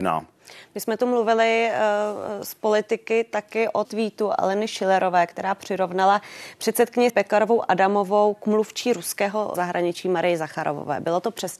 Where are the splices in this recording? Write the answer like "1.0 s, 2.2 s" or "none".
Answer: 3.8 s, 7.1 s, 9.5 s